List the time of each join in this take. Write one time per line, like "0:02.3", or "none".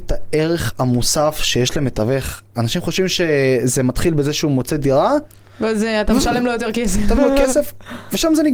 0:07.2